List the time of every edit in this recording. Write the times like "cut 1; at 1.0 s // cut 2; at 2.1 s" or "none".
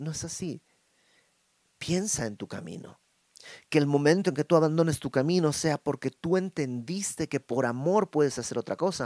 none